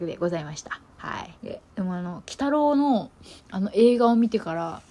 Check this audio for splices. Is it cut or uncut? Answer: cut